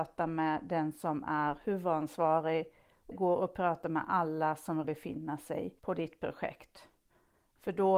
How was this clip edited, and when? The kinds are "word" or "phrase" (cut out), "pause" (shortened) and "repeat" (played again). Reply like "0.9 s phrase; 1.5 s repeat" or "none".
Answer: 3.1 s word; 4.8 s word; 5.8 s pause